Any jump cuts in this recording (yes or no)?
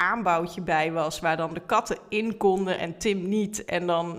no